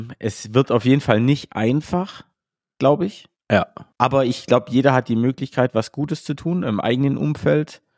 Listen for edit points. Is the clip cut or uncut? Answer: cut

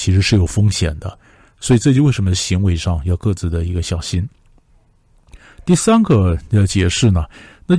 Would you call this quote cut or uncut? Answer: uncut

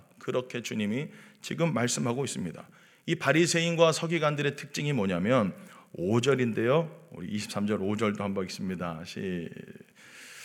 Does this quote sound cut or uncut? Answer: uncut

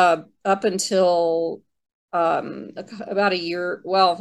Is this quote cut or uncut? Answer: cut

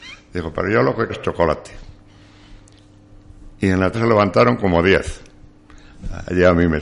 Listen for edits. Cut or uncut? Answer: cut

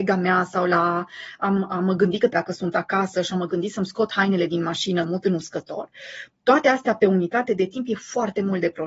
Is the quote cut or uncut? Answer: cut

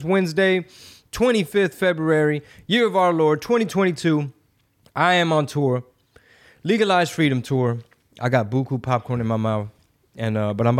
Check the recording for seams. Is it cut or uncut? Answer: uncut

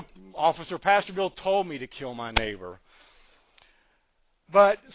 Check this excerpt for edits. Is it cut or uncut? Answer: uncut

